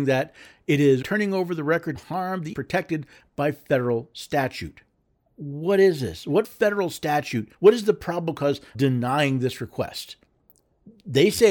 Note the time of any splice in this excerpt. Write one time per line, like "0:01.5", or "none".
0:01.0
0:01.9
0:02.5
0:05.1
0:06.4
0:07.5
0:08.7